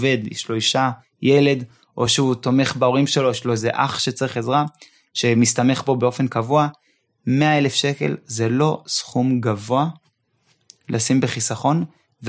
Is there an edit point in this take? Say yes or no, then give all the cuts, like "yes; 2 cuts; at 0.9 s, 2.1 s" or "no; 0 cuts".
no; 0 cuts